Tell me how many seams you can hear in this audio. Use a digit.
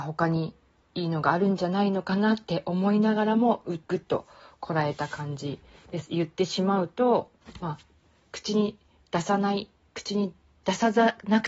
1